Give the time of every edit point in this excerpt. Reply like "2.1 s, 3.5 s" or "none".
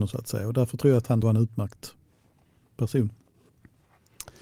1.2 s